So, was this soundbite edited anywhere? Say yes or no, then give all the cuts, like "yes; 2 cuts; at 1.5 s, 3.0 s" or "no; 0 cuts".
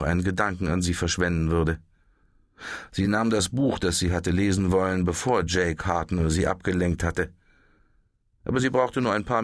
no; 0 cuts